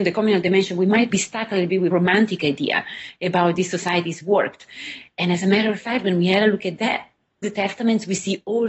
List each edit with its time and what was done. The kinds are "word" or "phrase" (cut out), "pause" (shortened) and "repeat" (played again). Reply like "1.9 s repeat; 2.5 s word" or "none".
1.1 s word; 1.9 s word; 7.4 s word